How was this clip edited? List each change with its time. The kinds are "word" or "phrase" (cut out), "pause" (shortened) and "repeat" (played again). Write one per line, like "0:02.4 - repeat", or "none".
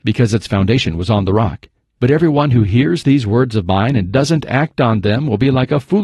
none